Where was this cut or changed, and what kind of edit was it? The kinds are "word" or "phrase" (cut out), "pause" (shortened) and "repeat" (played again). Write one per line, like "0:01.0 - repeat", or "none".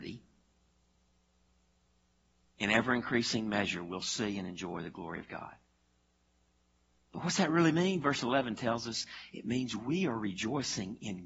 none